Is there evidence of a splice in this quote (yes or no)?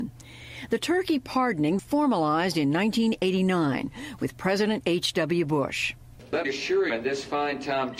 yes